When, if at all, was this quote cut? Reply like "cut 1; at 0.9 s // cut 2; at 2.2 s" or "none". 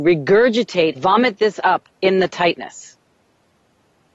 cut 1; at 0.9 s // cut 2; at 1.9 s